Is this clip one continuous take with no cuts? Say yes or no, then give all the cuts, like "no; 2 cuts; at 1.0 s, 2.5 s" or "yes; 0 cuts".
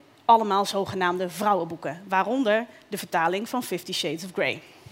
yes; 0 cuts